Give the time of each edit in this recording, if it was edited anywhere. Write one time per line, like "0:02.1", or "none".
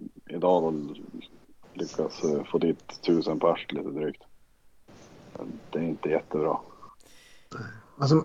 none